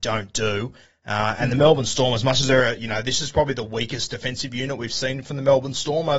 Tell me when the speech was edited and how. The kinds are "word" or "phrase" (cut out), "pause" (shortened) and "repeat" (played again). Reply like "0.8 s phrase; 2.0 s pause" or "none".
none